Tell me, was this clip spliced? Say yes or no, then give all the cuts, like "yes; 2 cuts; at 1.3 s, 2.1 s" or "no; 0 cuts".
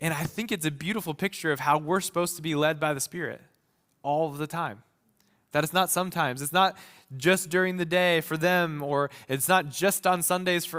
no; 0 cuts